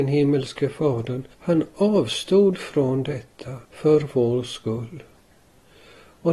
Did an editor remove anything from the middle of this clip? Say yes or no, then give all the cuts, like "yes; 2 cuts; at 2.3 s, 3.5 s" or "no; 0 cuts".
yes; 2 cuts; at 1.3 s, 3.6 s